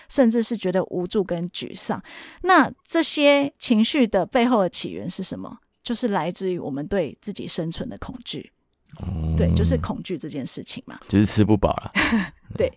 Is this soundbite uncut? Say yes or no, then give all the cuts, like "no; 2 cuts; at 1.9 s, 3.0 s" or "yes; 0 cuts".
no; 1 cut; at 11.0 s